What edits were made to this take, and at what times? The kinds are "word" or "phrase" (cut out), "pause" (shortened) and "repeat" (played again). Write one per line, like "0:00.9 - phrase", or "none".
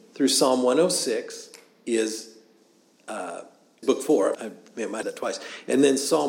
0:03.8 - word
0:04.3 - word
0:05.0 - word

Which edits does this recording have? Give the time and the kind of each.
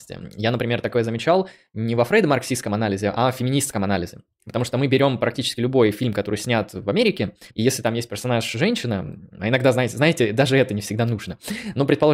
0:07.5 - pause
0:09.3 - pause

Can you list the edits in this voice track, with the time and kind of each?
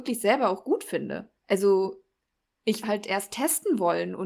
0:01.4 - pause
0:02.8 - phrase

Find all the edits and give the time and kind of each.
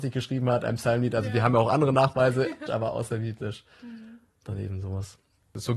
0:02.7 - word

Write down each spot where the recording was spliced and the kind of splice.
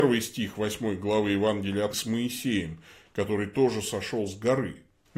0:01.9 - phrase

